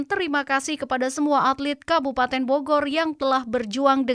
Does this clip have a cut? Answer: no; 0 cuts

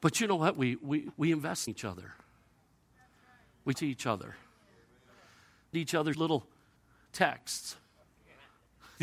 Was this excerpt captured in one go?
no; 6 cuts; at 1.1 s, 1.7 s, 3.7 s, 5.7 s, 6.1 s, 6.8 s

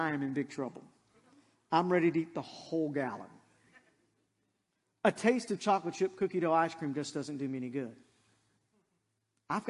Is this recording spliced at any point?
no; 0 cuts

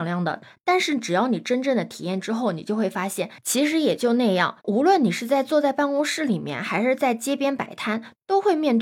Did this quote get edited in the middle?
yes; 1 cut; at 4.6 s

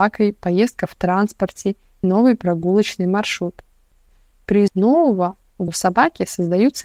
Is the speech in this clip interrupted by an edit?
yes; 3 cuts; at 2.0 s, 4.7 s, 5.7 s

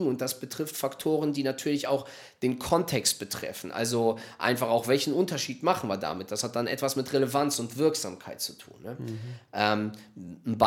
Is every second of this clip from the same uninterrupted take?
yes; 0 cuts

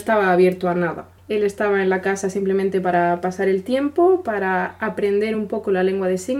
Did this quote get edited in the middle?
no; 0 cuts

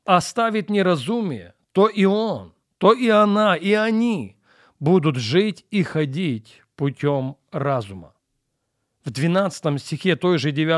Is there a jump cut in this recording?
no; 0 cuts

